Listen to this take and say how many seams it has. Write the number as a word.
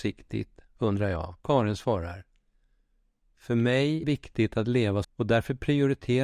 three